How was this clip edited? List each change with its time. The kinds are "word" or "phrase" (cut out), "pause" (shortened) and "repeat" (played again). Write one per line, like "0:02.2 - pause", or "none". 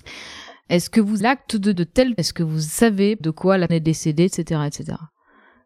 0:01.2 - word
0:01.7 - word
0:02.2 - word
0:03.2 - word
0:03.7 - word